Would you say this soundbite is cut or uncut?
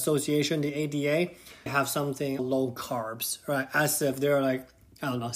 cut